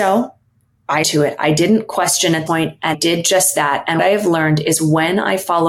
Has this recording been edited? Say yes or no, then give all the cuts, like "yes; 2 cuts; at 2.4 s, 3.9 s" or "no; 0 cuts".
yes; 4 cuts; at 1.0 s, 2.5 s, 2.9 s, 4.0 s